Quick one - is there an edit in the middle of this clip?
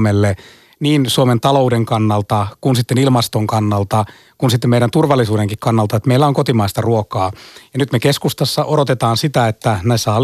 no; 0 cuts

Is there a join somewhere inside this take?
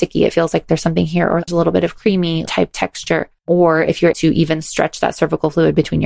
yes; 4 cuts; at 1.5 s, 2.5 s, 3.4 s, 4.1 s

